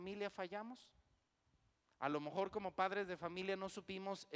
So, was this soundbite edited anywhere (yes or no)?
no